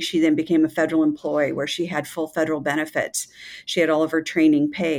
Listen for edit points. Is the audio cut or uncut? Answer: uncut